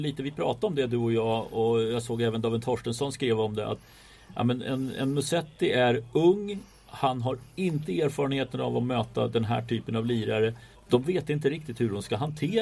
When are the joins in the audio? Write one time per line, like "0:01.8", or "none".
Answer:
0:10.7